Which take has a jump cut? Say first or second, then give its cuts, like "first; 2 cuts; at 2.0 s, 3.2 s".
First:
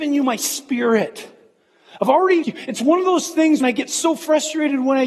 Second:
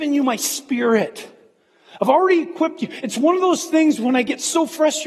first; 2 cuts; at 2.4 s, 3.6 s